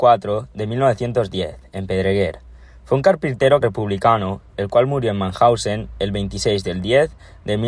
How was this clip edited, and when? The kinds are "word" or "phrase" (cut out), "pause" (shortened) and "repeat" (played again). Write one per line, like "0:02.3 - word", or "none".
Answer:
0:03.6 - word

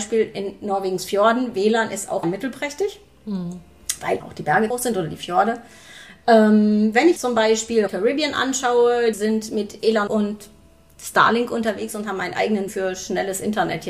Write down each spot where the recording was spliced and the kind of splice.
0:02.2 - word
0:04.2 - word
0:04.7 - word
0:07.2 - word
0:07.9 - word
0:09.1 - word
0:10.1 - word
0:12.7 - word

